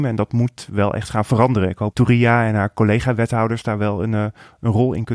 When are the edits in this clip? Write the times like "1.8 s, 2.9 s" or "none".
1.9 s